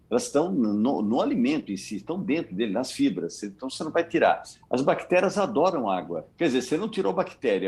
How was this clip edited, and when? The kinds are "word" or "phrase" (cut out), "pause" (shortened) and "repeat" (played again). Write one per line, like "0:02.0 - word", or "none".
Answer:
0:06.3 - pause